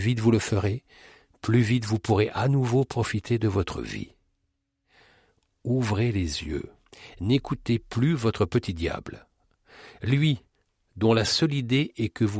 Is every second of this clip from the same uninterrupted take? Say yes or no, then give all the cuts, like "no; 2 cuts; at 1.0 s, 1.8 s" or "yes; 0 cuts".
yes; 0 cuts